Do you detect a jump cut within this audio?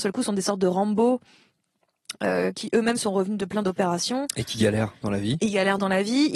no; 0 cuts

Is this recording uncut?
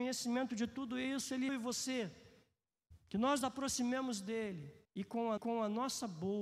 no; 4 cuts; at 1.5 s, 3.4 s, 4.8 s, 5.4 s

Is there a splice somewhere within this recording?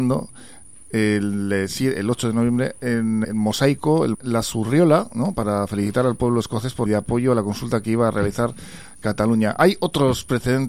yes; 3 cuts; at 3.2 s, 4.1 s, 6.9 s

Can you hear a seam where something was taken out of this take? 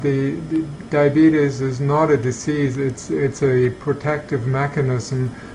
no; 0 cuts

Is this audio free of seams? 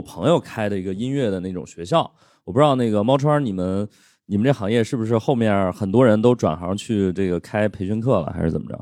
yes; 0 cuts

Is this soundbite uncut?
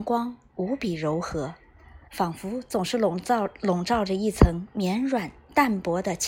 no; 1 cut; at 2.1 s

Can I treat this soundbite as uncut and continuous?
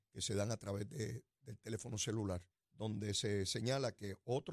no; 1 cut; at 2.5 s

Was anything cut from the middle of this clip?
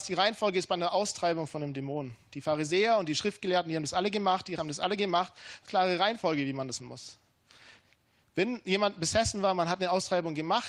yes; 3 cuts; at 4.6 s, 5.6 s, 6.8 s

